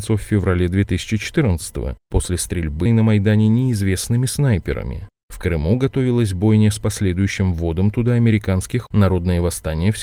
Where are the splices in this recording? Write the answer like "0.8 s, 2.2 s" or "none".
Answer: 2.9 s, 8.9 s